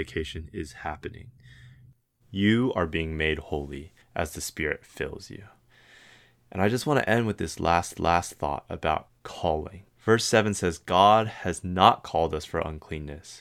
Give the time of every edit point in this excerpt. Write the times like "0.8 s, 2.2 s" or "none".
4.0 s, 8.0 s, 9.9 s

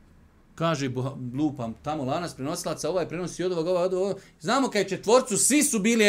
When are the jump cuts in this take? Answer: none

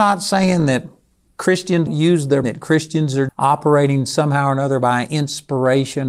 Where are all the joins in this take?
1.9 s, 2.4 s, 3.3 s

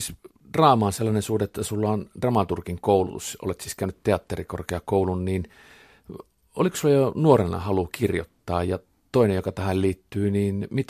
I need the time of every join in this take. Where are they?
none

